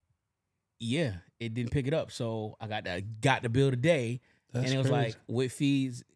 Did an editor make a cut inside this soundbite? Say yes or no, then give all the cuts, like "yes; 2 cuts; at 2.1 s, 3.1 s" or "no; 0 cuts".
no; 0 cuts